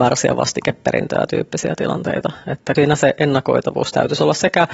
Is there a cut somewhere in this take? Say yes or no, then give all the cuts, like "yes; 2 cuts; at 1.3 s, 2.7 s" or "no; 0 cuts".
yes; 2 cuts; at 1.3 s, 2.8 s